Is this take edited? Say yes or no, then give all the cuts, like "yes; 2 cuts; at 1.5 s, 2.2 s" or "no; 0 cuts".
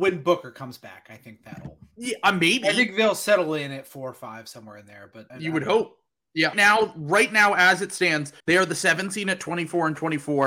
yes; 3 cuts; at 5.3 s, 6.5 s, 8.4 s